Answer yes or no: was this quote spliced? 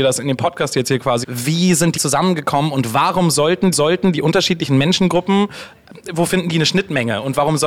yes